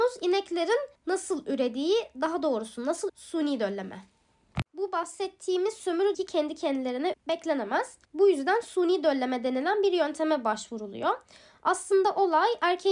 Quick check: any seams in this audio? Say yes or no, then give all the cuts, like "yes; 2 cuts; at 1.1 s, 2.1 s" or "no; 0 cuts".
yes; 6 cuts; at 0.9 s, 3.1 s, 4.7 s, 6.1 s, 7.1 s, 8.0 s